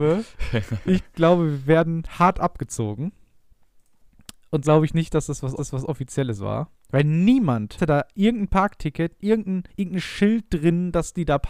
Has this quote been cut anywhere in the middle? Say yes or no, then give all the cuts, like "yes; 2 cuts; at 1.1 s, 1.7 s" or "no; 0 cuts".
yes; 4 cuts; at 4.6 s, 5.6 s, 7.8 s, 9.7 s